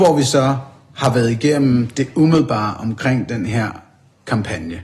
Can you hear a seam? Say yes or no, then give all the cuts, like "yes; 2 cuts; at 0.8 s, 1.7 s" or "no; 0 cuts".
no; 0 cuts